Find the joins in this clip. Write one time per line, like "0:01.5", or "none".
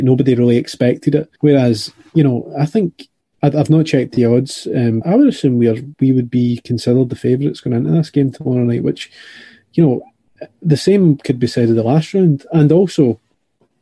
0:01.4
0:05.0
0:05.9